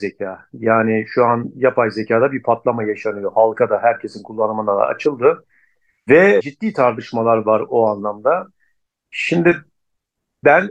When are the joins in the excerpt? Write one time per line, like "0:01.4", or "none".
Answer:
none